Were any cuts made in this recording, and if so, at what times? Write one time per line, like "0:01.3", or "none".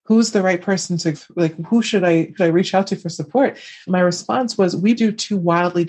0:01.1
0:02.4
0:03.9
0:05.0

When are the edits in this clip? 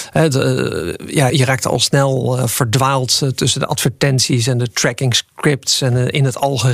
0:01.3

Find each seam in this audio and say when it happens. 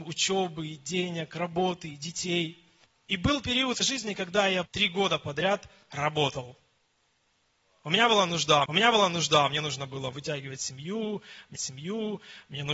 0:02.8
0:03.8
0:04.7
0:08.7
0:11.6

